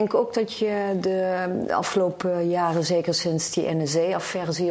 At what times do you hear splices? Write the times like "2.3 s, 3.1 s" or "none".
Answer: none